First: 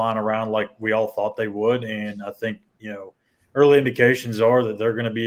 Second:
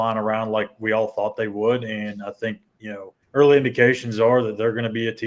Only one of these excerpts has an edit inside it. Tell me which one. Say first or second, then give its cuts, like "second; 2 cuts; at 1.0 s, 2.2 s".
second; 1 cut; at 3.2 s